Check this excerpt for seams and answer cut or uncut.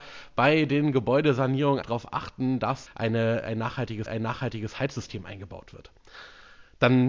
cut